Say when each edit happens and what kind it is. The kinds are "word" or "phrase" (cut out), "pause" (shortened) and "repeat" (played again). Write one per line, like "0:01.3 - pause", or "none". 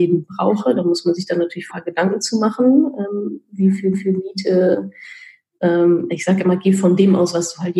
0:01.7 - phrase
0:03.9 - repeat